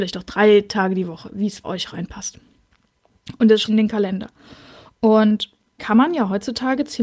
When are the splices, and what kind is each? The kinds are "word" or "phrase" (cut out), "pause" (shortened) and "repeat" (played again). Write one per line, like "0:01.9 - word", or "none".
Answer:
0:01.6 - word
0:03.6 - word
0:05.8 - word